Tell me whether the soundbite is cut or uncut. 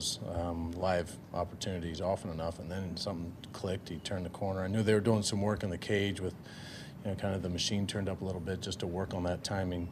uncut